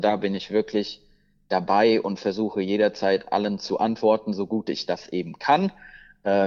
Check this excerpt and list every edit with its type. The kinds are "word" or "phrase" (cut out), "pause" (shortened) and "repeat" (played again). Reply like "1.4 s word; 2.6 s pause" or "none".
none